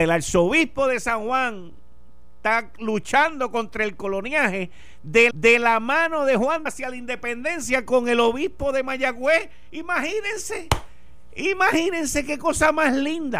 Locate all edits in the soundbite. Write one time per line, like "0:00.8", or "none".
0:05.3
0:06.7